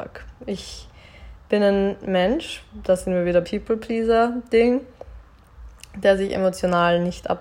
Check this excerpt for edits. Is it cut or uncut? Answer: cut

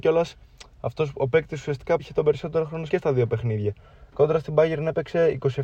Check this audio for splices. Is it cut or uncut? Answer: cut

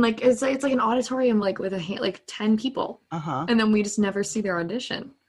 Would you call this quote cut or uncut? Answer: uncut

